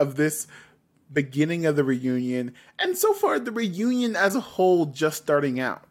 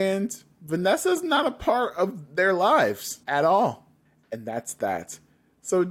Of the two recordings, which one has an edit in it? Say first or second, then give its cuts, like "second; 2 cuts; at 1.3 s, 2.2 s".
second; 2 cuts; at 3.2 s, 4.1 s